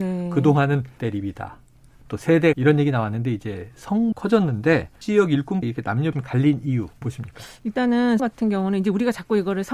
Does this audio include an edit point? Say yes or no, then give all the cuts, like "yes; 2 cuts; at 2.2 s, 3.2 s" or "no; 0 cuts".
yes; 8 cuts; at 1.0 s, 2.5 s, 4.1 s, 5.0 s, 5.6 s, 6.1 s, 7.0 s, 8.2 s